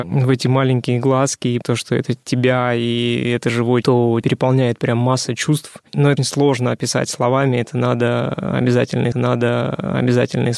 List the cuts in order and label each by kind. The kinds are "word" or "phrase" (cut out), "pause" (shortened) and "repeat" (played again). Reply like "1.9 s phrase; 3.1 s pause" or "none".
1.6 s word; 2.2 s word; 3.8 s word; 4.2 s word; 6.2 s word; 9.1 s repeat